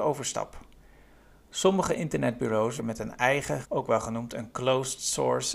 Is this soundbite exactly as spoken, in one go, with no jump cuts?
no; 2 cuts; at 2.8 s, 3.6 s

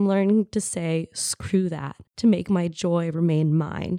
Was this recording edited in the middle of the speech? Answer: yes; 1 cut; at 2.1 s

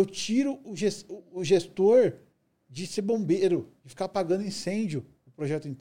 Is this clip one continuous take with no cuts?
yes; 0 cuts

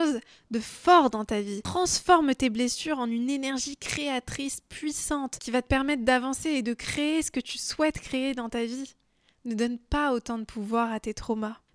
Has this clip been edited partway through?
yes; 1 cut; at 9.1 s

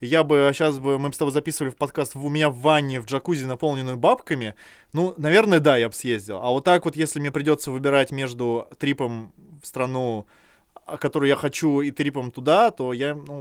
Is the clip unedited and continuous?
yes; 0 cuts

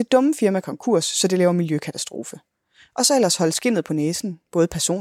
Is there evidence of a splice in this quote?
no; 0 cuts

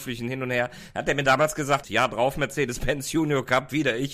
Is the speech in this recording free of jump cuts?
no; 1 cut; at 1.8 s

